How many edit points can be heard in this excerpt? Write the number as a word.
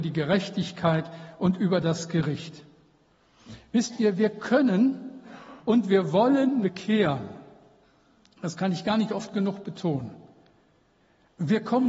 two